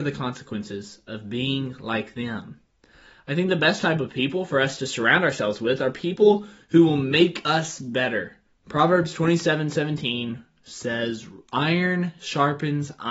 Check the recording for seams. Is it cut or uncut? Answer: uncut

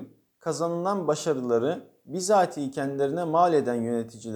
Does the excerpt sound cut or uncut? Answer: uncut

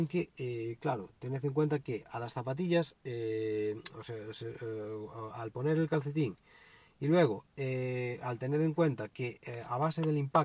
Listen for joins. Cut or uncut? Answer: uncut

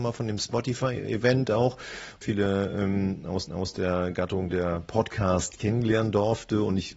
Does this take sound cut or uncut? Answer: cut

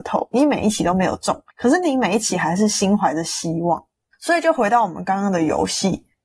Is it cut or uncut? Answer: cut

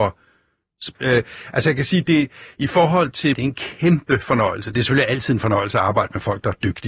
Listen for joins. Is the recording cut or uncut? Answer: cut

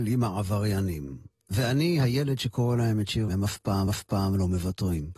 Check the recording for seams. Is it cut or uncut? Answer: cut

